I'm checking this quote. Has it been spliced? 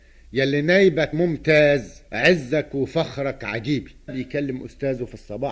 yes; 3 cuts; at 1.1 s, 2.1 s, 4.1 s

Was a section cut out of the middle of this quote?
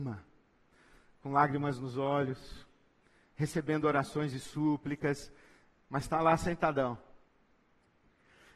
no; 0 cuts

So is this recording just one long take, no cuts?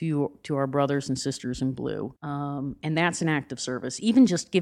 no; 1 cut; at 2.2 s

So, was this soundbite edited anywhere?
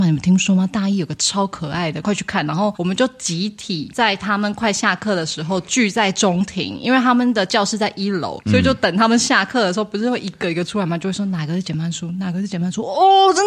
yes; 1 cut; at 2.0 s

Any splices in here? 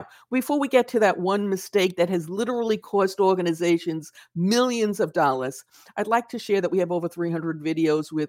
no; 0 cuts

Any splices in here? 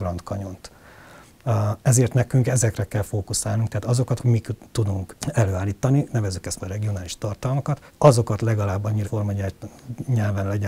yes; 5 cuts; at 4.2 s, 5.2 s, 6.6 s, 7.9 s, 9.0 s

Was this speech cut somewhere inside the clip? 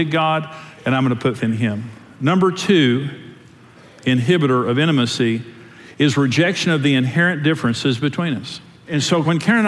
yes; 1 cut; at 1.4 s

